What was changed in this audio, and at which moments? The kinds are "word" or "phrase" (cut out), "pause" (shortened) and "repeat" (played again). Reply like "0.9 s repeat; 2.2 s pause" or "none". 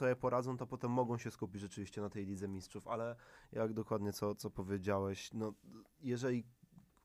none